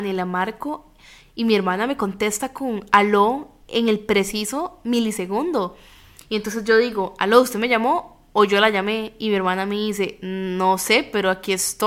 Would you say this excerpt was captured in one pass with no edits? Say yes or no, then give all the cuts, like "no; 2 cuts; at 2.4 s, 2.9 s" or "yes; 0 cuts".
yes; 0 cuts